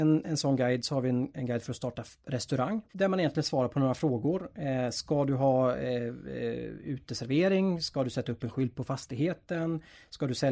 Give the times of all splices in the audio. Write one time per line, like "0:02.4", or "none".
0:02.9